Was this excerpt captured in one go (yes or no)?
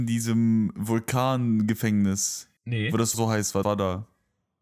no